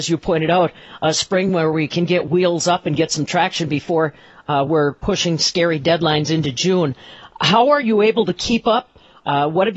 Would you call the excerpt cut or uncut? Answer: uncut